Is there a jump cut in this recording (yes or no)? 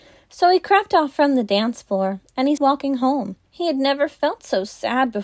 yes